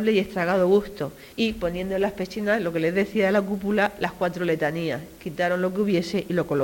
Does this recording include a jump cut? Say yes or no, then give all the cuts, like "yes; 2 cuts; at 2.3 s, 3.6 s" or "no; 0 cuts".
yes; 1 cut; at 1.3 s